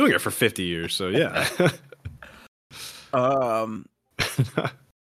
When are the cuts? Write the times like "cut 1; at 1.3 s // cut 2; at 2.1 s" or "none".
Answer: cut 1; at 2.2 s